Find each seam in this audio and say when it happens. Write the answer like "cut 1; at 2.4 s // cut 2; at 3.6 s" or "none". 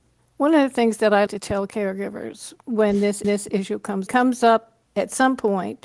cut 1; at 1.3 s // cut 2; at 3.2 s // cut 3; at 4.1 s // cut 4; at 4.9 s